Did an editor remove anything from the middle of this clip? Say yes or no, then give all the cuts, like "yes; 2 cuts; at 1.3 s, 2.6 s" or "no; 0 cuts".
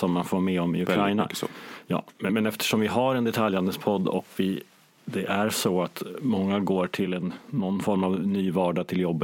yes; 1 cut; at 2.3 s